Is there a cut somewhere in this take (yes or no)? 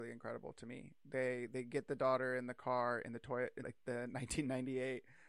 yes